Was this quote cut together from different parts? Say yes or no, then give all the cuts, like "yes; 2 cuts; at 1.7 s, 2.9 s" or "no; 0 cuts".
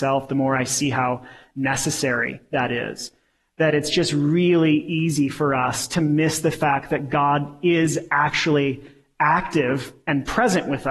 no; 0 cuts